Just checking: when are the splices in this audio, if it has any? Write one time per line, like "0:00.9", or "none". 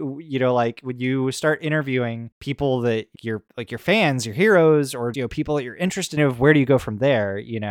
0:02.3
0:03.1
0:03.5
0:05.1
0:06.2

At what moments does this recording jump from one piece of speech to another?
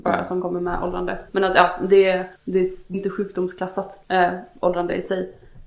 0:01.3
0:02.3
0:02.9
0:04.0

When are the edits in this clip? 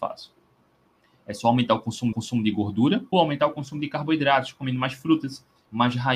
0:02.1
0:03.1

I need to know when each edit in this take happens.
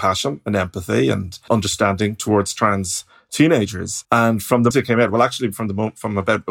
0:01.5
0:04.0
0:04.7

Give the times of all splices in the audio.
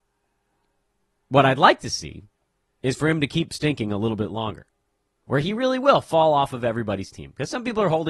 none

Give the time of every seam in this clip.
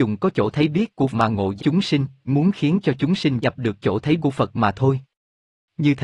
0:01.1
0:01.6
0:02.3
0:03.4
0:03.8
0:04.2

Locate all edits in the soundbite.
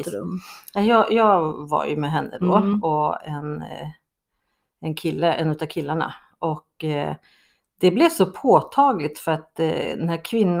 none

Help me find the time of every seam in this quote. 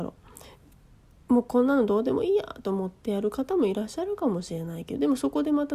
0:01.1

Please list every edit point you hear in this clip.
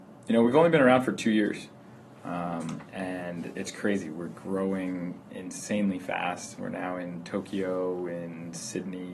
0:02.9
0:05.3

